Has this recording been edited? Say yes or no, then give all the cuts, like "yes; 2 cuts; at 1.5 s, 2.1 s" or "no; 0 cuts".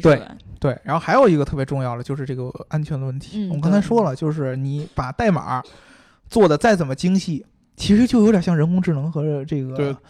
no; 0 cuts